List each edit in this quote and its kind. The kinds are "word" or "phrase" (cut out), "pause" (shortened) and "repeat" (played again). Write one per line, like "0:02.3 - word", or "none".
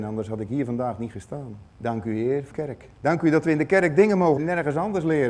0:01.7 - pause
0:02.5 - word
0:02.9 - pause
0:04.4 - phrase